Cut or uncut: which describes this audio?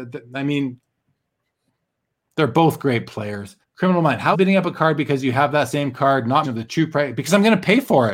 cut